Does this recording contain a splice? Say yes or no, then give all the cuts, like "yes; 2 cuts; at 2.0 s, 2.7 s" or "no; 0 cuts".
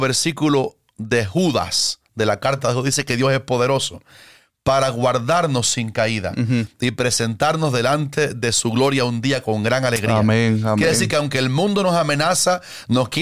no; 0 cuts